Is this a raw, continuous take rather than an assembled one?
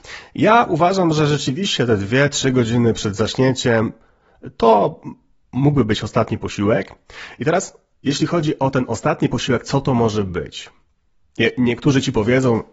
yes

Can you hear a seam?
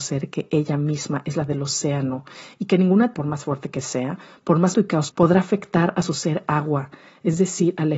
yes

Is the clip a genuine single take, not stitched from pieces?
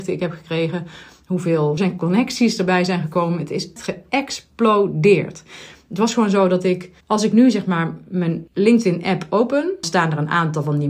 no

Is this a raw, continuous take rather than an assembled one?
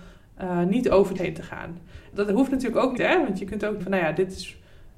no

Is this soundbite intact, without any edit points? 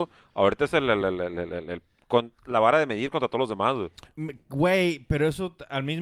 yes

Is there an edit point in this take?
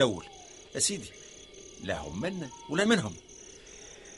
yes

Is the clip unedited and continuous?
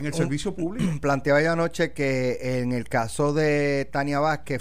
yes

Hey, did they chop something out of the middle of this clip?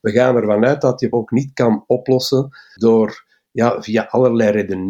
yes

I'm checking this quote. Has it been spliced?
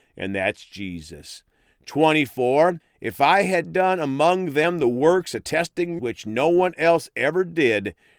yes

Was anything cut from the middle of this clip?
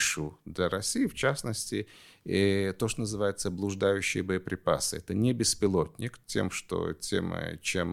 no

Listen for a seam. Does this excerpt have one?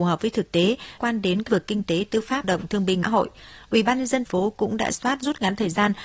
yes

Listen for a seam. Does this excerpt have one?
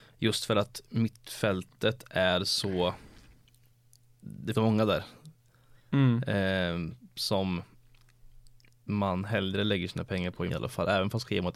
yes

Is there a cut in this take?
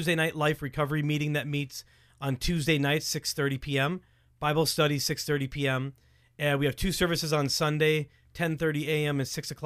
no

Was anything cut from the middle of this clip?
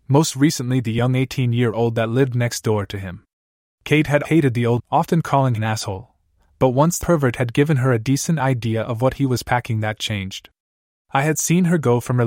yes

